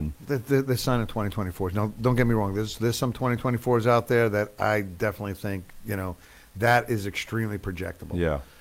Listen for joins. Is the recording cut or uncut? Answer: uncut